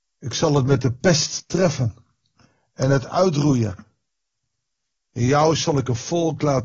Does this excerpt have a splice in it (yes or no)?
no